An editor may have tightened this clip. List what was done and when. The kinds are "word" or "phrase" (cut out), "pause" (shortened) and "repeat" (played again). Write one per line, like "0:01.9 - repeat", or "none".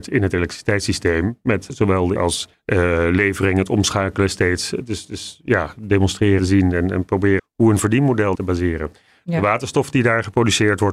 0:01.7 - word
0:02.2 - word
0:02.5 - pause
0:06.4 - word
0:07.4 - word
0:08.3 - phrase